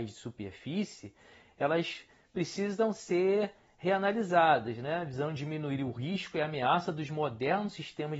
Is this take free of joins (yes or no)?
yes